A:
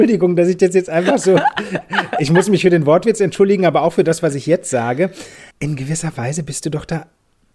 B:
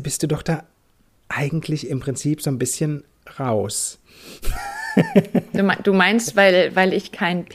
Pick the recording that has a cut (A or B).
A